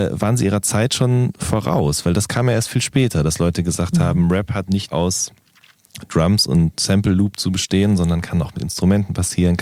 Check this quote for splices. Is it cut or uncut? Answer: cut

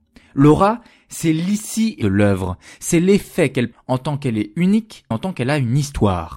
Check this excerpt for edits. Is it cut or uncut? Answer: cut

